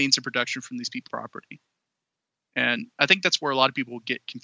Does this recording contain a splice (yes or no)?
yes